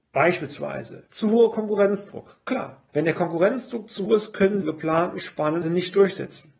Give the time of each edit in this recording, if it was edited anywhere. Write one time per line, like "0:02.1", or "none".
0:01.1
0:02.9
0:04.1
0:04.6
0:05.6